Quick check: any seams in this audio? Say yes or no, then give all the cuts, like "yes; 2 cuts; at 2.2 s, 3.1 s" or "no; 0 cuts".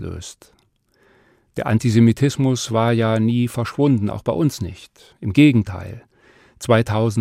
no; 0 cuts